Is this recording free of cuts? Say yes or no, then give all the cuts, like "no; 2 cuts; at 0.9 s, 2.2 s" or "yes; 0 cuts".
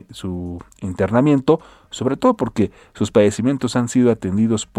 yes; 0 cuts